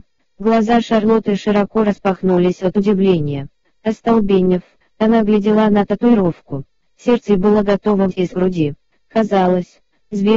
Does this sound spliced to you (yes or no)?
yes